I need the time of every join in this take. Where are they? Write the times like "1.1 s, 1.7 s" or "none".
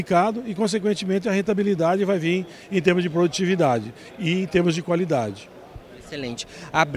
none